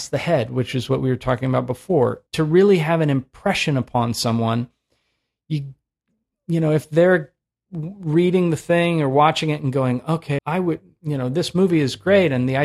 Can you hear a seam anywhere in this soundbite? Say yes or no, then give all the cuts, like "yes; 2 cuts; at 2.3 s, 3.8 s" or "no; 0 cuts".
yes; 2 cuts; at 2.3 s, 10.4 s